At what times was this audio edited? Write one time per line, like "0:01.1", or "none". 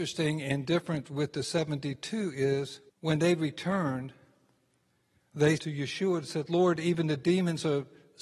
0:02.9
0:05.6